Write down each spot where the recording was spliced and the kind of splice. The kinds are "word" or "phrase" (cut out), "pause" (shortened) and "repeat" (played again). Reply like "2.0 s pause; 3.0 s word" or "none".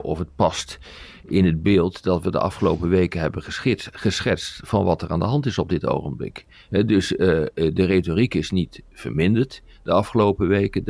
none